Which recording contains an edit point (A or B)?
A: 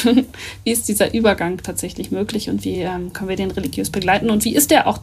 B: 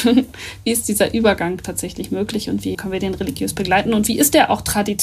B